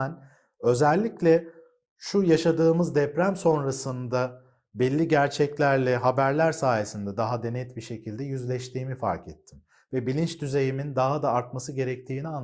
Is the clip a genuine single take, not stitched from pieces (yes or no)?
yes